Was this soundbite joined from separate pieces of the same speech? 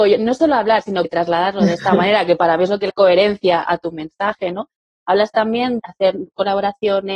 yes; 4 cuts; at 1.0 s, 2.9 s, 3.7 s, 5.8 s

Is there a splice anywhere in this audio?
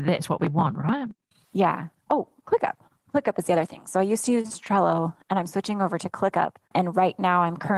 no; 0 cuts

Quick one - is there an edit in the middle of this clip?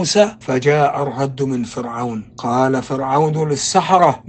no; 0 cuts

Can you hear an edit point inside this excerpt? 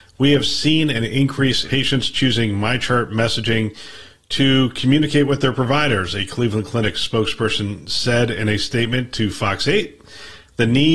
yes; 1 cut; at 1.6 s

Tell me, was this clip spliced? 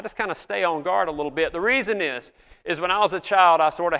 no; 0 cuts

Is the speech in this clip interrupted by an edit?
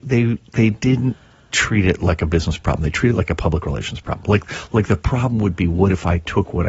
no; 0 cuts

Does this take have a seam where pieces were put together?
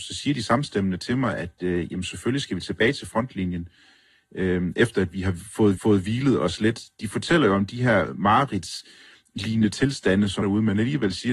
yes; 2 cuts; at 5.8 s, 10.4 s

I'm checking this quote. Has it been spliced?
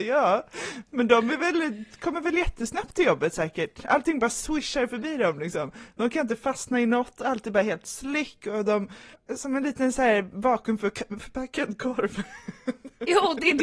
yes; 1 cut; at 9.1 s

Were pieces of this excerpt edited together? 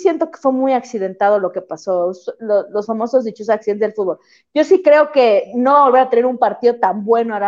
no; 0 cuts

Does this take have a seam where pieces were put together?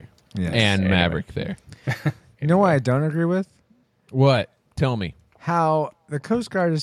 no; 0 cuts

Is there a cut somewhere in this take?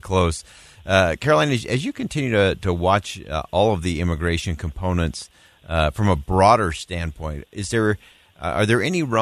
no; 0 cuts

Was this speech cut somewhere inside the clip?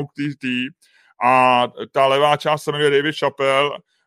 no; 0 cuts

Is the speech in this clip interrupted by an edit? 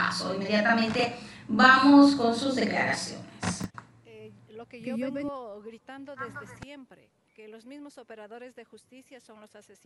no; 0 cuts

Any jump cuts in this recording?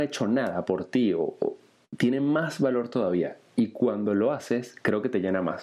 no; 0 cuts

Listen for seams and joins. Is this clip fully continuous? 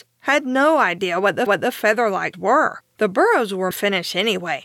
no; 4 cuts; at 1.5 s, 2.3 s, 2.9 s, 3.7 s

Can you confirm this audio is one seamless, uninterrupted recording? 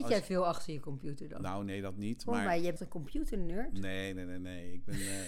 no; 1 cut; at 2.8 s

